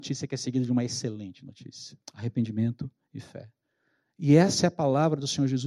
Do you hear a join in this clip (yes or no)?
yes